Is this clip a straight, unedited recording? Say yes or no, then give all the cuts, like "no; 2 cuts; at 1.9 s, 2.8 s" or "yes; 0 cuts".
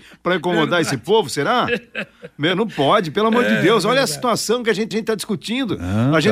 no; 1 cut; at 4.9 s